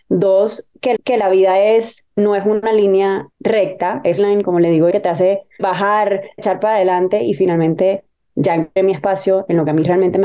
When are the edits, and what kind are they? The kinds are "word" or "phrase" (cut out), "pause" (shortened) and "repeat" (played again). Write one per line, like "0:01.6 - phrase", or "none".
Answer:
0:01.0 - repeat
0:02.1 - pause
0:03.3 - pause
0:04.2 - phrase
0:04.9 - word
0:05.6 - word
0:06.4 - word
0:08.8 - word